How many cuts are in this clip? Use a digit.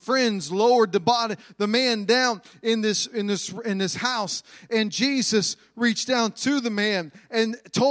0